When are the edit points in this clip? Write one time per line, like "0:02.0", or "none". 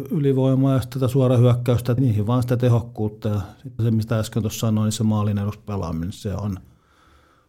0:02.0
0:03.8